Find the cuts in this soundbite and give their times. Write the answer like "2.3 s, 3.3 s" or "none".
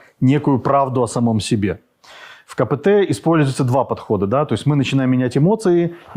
none